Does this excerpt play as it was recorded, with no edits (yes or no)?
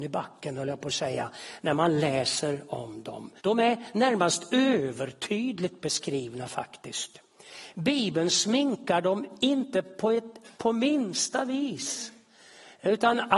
no